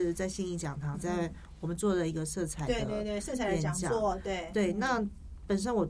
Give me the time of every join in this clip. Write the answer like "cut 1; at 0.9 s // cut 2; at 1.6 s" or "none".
cut 1; at 0.9 s